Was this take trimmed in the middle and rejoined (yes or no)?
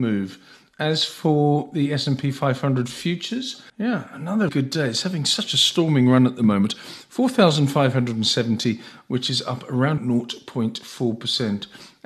yes